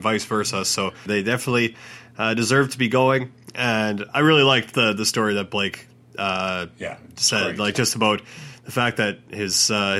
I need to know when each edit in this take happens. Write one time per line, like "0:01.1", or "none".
none

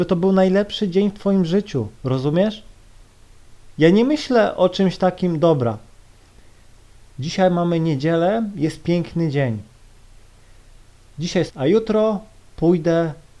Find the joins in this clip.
0:01.9
0:11.5

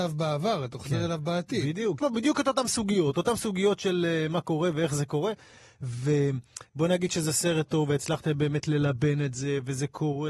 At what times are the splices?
0:02.0

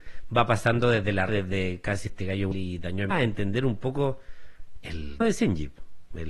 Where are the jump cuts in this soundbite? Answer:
0:01.3
0:02.1
0:02.5
0:03.1
0:05.2

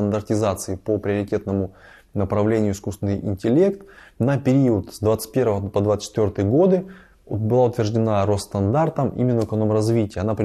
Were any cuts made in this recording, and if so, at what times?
none

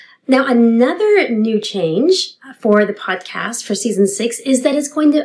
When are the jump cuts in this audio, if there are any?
none

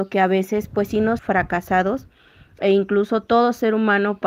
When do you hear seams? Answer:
0:01.2

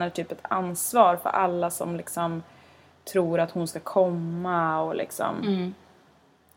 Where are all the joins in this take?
none

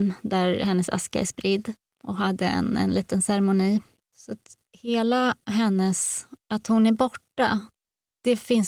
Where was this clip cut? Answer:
none

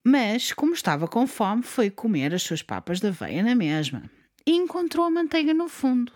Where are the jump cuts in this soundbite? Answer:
none

